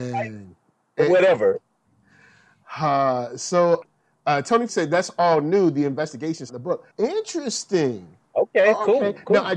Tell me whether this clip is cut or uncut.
cut